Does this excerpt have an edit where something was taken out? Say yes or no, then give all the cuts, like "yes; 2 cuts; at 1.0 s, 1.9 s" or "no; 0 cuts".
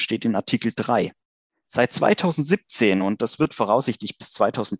no; 0 cuts